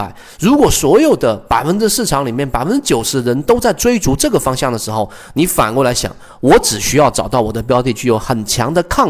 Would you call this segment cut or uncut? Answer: uncut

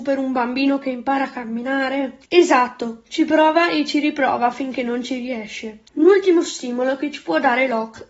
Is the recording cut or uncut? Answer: cut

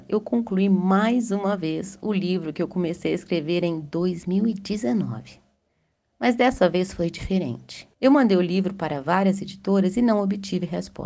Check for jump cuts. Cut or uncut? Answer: cut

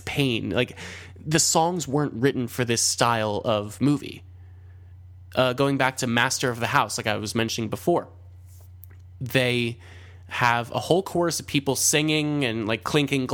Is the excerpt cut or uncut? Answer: uncut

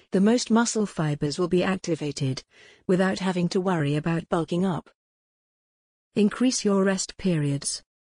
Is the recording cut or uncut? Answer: uncut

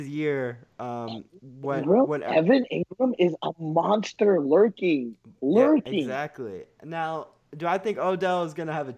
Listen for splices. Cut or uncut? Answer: uncut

